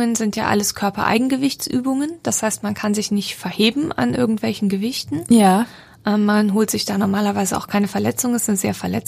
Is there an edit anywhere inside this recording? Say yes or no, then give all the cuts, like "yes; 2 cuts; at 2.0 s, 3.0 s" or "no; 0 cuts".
no; 0 cuts